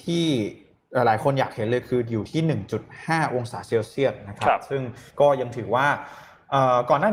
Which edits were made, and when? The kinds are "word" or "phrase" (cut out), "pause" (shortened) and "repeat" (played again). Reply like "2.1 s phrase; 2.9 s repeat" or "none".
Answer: 5.1 s pause